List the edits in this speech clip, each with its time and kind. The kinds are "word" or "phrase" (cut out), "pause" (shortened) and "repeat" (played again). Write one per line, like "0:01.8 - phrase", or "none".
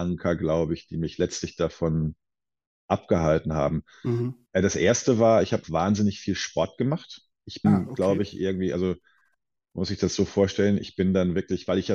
0:05.6 - word
0:07.6 - word